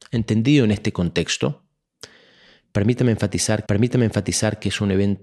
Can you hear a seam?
yes; 1 cut; at 3.7 s

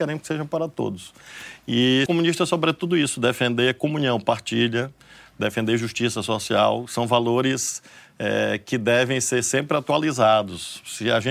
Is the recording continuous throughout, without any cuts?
no; 1 cut; at 2.1 s

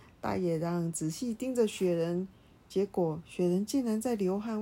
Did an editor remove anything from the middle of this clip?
no; 0 cuts

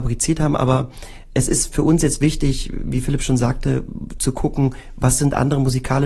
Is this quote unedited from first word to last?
yes; 0 cuts

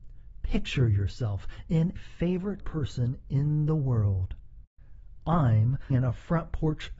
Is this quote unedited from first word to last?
no; 3 cuts; at 2.0 s, 2.6 s, 5.9 s

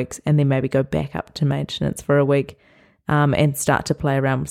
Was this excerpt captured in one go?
yes; 0 cuts

